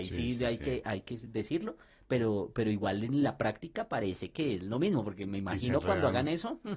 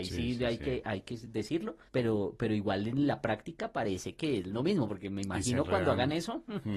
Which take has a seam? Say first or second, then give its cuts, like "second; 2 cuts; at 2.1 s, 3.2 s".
second; 1 cut; at 1.9 s